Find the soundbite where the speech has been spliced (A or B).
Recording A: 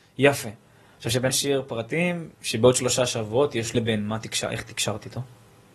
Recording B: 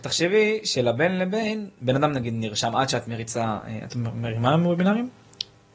A